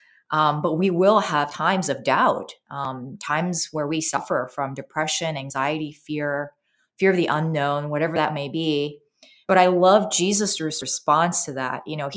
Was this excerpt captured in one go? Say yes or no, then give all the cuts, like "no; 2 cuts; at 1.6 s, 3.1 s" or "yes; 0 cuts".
yes; 0 cuts